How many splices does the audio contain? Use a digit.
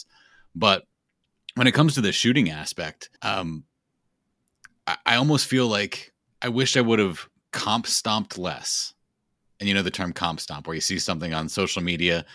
2